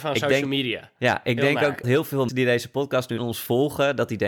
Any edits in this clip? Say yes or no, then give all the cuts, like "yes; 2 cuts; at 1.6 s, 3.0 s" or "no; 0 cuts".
yes; 3 cuts; at 1.8 s, 2.3 s, 3.2 s